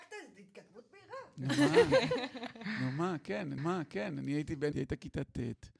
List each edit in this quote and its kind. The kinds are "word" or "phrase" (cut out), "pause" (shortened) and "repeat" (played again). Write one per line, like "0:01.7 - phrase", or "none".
0:03.6 - repeat
0:04.7 - phrase